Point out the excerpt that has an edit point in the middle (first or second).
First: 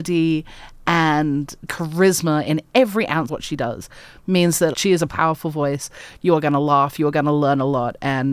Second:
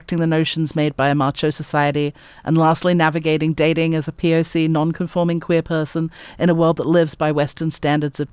first